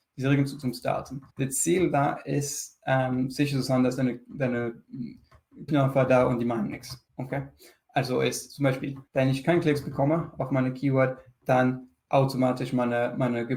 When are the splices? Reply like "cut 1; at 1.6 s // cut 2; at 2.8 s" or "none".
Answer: cut 1; at 1.3 s // cut 2; at 5.7 s // cut 3; at 7.1 s // cut 4; at 9.1 s